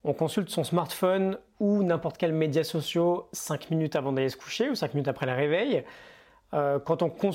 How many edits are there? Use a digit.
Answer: 0